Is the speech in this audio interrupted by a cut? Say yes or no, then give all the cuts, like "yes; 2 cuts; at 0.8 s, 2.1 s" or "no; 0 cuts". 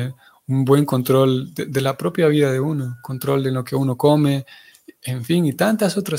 no; 0 cuts